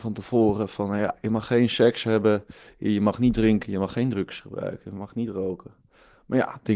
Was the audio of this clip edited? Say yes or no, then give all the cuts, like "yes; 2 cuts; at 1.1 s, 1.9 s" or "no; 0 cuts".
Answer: no; 0 cuts